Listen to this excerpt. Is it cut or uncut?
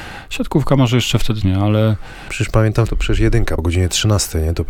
cut